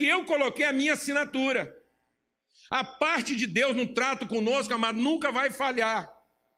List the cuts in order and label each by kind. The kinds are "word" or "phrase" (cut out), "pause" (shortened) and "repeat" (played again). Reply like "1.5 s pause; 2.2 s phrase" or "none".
none